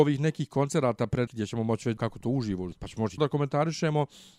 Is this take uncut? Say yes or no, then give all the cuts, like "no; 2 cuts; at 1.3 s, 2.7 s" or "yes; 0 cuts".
no; 4 cuts; at 1.3 s, 2.0 s, 2.7 s, 3.2 s